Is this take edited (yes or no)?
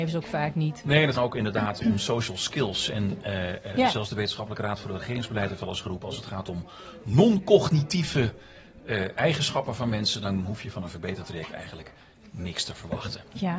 yes